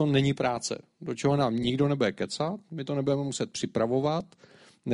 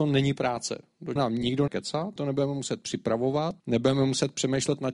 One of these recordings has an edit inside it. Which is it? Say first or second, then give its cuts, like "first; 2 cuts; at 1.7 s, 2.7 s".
second; 4 cuts; at 1.2 s, 1.7 s, 2.2 s, 3.6 s